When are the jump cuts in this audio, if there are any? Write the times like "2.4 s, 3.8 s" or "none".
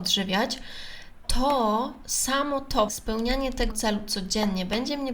1.2 s, 2.9 s, 3.7 s